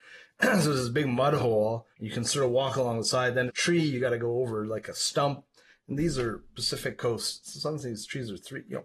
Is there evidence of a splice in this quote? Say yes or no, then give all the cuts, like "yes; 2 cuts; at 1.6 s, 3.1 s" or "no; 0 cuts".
yes; 2 cuts; at 1.9 s, 3.5 s